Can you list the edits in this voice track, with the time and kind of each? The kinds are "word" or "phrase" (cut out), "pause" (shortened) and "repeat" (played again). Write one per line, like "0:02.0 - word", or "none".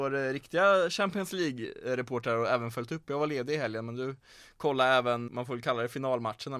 0:05.3 - word